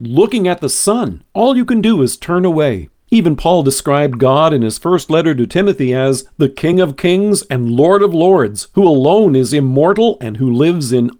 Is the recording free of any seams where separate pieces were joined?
yes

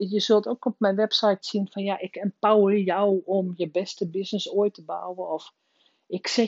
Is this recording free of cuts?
no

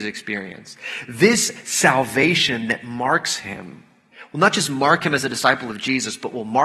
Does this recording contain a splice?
no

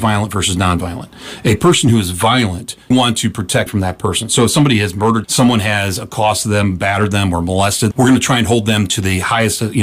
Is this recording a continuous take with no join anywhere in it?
no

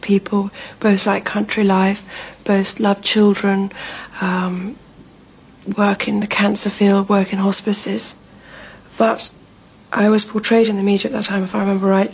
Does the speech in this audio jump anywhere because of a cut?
no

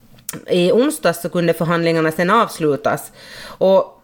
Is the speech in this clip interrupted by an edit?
no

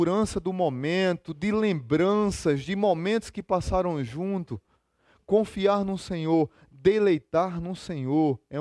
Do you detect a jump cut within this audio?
no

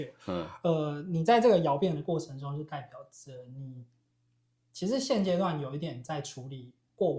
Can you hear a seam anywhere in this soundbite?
no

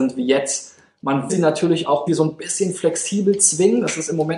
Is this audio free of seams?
no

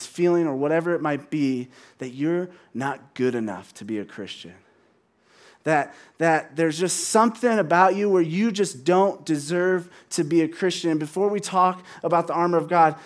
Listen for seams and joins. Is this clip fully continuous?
yes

